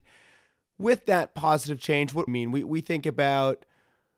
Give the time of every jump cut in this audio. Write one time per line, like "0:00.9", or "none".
0:02.3